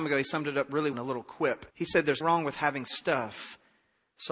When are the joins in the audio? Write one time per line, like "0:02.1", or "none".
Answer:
0:00.9
0:01.7
0:02.2